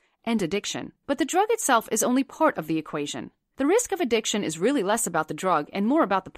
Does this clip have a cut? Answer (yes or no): yes